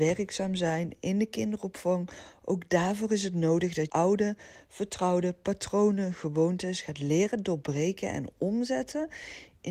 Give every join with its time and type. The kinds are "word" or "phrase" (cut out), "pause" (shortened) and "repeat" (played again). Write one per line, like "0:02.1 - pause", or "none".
0:03.9 - word